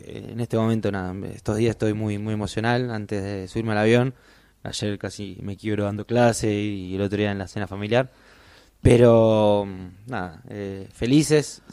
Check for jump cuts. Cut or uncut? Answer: uncut